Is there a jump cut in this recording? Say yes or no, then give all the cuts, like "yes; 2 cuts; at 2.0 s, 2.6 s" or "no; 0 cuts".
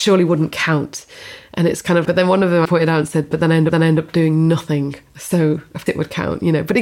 yes; 4 cuts; at 2.1 s, 2.7 s, 3.7 s, 5.9 s